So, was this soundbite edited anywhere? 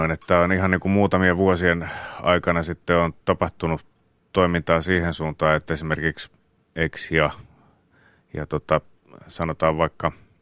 yes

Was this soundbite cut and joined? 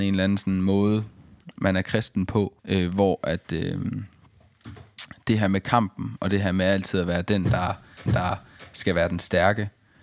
yes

